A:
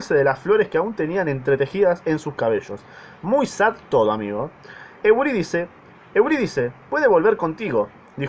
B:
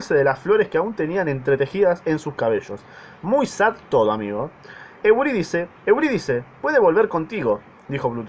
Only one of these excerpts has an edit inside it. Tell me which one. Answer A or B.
B